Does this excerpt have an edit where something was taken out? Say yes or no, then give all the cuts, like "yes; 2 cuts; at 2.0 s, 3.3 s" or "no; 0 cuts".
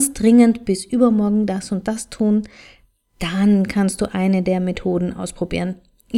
no; 0 cuts